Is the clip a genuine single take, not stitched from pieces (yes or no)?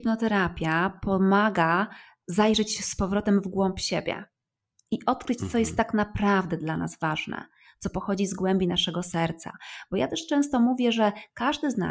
yes